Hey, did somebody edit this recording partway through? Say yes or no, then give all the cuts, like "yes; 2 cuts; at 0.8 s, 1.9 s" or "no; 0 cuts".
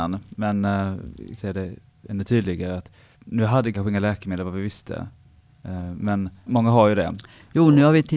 yes; 4 cuts; at 1.4 s, 3.1 s, 3.7 s, 6.5 s